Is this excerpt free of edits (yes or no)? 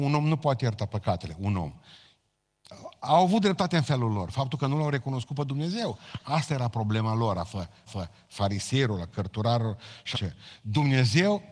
no